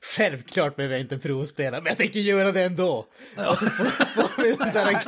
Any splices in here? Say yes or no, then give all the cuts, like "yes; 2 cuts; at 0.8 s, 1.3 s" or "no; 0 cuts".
no; 0 cuts